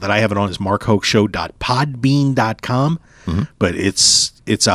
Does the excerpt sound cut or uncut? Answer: uncut